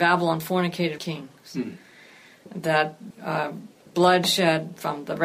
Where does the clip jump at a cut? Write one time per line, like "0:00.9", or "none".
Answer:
0:01.0
0:03.1
0:03.9